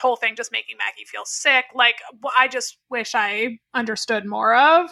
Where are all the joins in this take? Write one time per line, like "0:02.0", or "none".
0:03.6